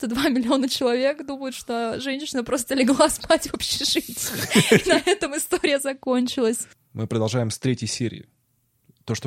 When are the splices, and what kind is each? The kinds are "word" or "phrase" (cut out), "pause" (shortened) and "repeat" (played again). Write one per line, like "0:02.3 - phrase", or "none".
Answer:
none